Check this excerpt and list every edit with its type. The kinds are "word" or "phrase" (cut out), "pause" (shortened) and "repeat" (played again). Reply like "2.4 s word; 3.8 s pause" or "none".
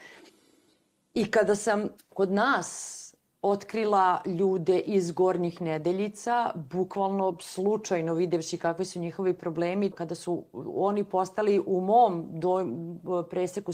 2.0 s pause; 9.9 s word